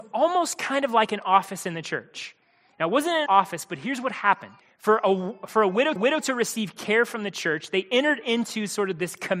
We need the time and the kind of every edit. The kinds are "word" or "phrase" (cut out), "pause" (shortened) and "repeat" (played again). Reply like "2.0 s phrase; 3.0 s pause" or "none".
3.3 s word; 4.6 s pause; 6.0 s repeat